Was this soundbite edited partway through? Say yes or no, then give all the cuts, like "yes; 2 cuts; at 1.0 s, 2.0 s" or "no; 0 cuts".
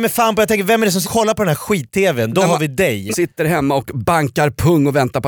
yes; 2 cuts; at 1.0 s, 3.1 s